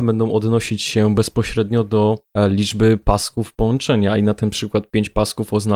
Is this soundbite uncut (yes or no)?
no